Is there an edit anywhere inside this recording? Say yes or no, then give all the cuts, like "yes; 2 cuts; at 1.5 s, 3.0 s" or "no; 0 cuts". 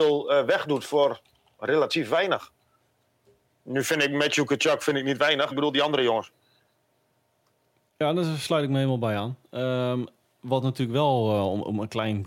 yes; 1 cut; at 5.5 s